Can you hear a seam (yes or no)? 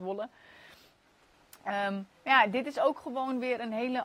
yes